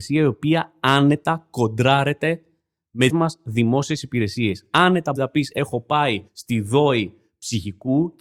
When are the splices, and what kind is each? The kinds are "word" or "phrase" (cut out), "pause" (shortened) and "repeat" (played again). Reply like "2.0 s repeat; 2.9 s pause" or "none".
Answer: 3.1 s word; 5.2 s word; 6.3 s pause